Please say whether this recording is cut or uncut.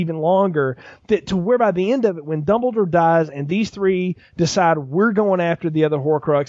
uncut